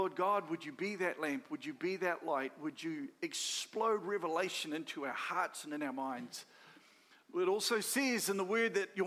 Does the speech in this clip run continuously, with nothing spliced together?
yes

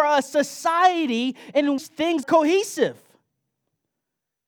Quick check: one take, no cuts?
no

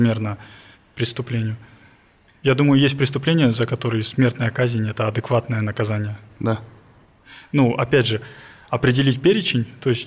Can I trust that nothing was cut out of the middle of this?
yes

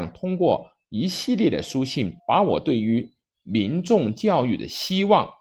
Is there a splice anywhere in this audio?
yes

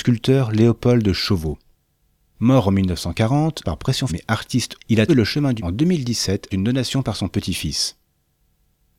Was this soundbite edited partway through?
yes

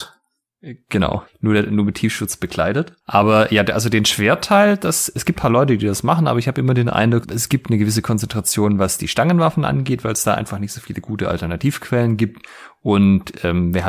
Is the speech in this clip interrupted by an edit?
yes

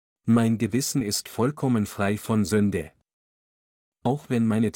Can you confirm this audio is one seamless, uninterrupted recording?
yes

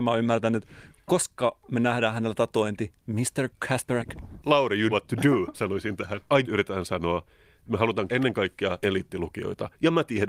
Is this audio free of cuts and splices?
no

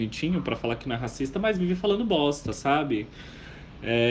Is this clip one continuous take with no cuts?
yes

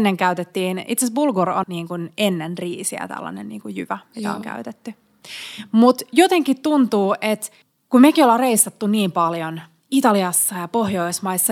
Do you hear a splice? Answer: yes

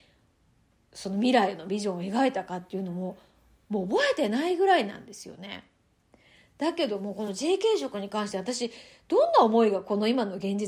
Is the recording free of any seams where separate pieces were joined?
yes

